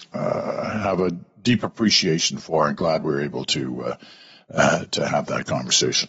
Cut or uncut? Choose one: uncut